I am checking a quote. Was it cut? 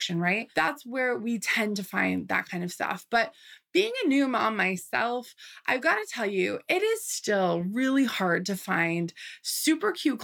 no; 0 cuts

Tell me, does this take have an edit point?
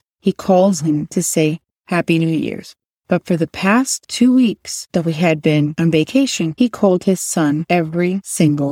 no; 0 cuts

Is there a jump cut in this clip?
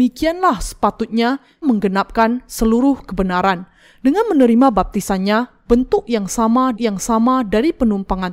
yes; 2 cuts; at 1.6 s, 6.7 s

